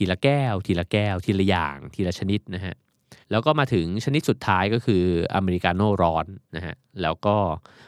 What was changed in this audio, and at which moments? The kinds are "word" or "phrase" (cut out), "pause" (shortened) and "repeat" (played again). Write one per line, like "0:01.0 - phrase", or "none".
0:03.2 - pause